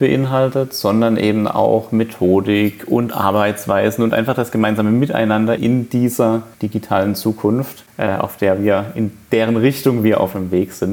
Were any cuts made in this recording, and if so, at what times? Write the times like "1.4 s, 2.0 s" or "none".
5.6 s, 6.5 s